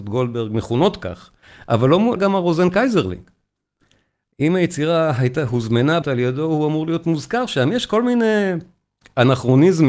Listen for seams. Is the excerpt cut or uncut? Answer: cut